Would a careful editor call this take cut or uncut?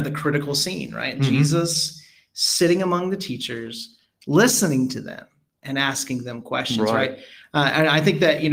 uncut